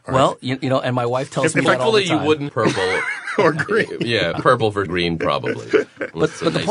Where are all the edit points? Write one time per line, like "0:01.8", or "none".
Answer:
0:02.5
0:04.3
0:04.9